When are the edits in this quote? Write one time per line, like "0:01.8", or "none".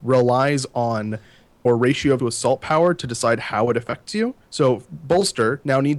0:01.6
0:02.2
0:04.4